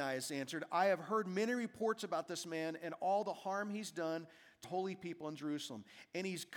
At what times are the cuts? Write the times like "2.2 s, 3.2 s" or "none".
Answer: 4.6 s